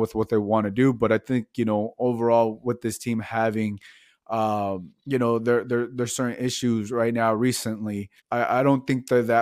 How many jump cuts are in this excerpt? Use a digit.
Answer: 2